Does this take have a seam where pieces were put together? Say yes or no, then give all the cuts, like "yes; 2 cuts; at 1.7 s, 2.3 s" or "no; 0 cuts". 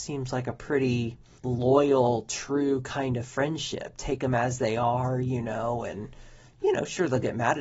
yes; 1 cut; at 1.4 s